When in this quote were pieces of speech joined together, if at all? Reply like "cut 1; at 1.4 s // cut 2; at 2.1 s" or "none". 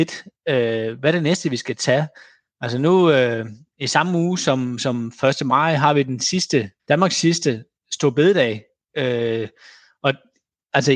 cut 1; at 6.8 s